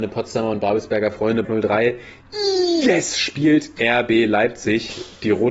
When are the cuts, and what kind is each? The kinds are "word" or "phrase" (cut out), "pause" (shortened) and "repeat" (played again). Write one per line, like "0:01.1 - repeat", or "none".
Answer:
0:01.4 - word
0:03.8 - word